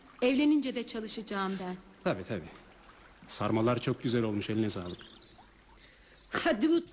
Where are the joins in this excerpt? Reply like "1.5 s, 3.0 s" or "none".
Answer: none